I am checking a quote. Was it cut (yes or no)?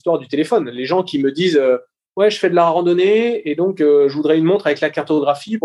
no